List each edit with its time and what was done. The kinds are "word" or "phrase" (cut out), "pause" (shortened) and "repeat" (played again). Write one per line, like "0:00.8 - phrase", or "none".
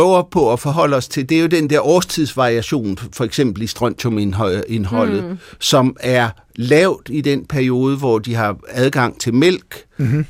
none